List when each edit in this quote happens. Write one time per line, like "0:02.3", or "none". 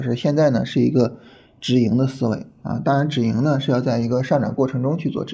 none